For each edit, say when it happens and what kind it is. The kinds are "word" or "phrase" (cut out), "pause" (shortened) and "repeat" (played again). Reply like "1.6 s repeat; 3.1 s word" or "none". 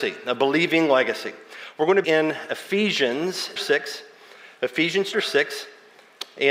2.0 s word; 3.6 s word; 5.1 s word